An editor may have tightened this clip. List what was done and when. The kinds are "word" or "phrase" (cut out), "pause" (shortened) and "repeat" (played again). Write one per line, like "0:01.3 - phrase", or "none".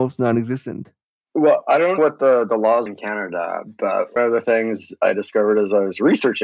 0:02.0 - word
0:02.9 - word
0:04.2 - word